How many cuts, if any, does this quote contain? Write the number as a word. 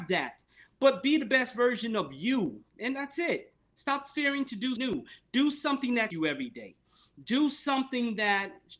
two